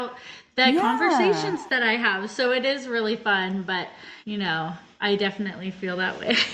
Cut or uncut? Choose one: cut